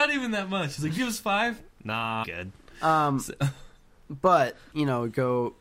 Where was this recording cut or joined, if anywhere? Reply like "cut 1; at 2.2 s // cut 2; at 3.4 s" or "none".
cut 1; at 1.0 s // cut 2; at 2.2 s // cut 3; at 4.7 s

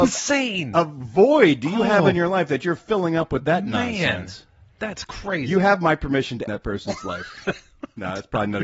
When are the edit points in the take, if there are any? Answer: cut 1; at 6.5 s

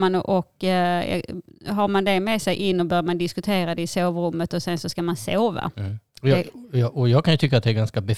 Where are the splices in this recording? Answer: cut 1; at 6.1 s

